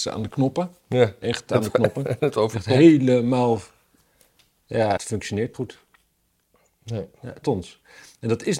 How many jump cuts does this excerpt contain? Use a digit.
4